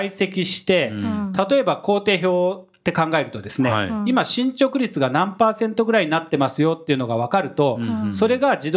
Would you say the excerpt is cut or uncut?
uncut